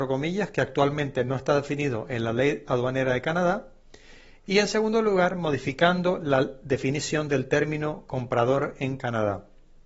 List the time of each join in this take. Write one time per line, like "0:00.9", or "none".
none